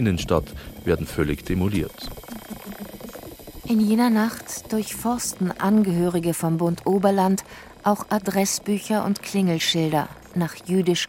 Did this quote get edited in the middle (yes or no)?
no